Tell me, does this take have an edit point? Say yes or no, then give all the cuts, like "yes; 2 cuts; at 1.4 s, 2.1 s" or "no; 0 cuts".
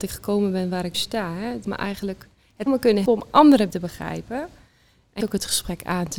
yes; 6 cuts; at 0.9 s, 1.6 s, 2.7 s, 3.1 s, 3.7 s, 5.2 s